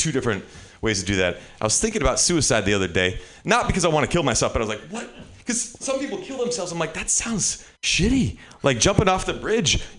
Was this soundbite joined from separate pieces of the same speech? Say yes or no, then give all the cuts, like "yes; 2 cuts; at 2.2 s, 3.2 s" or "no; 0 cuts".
yes; 1 cut; at 7.8 s